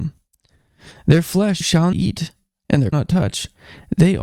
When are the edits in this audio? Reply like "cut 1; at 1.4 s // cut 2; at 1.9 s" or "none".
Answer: cut 1; at 1.6 s // cut 2; at 1.9 s // cut 3; at 2.9 s